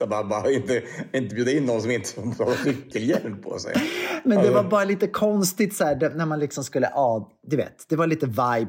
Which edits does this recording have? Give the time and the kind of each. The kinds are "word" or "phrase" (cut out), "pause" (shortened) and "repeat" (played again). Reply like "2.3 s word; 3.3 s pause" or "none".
none